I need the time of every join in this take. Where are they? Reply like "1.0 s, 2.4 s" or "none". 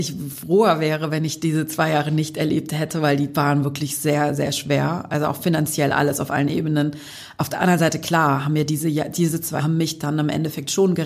9.6 s